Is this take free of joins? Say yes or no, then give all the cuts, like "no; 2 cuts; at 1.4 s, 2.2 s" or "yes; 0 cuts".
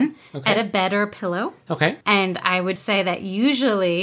no; 2 cuts; at 2.0 s, 2.8 s